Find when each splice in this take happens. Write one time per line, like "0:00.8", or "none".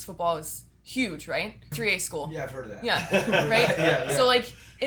0:01.7